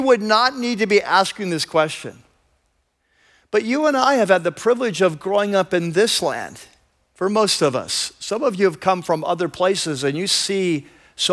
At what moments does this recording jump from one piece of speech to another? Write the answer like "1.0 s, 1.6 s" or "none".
none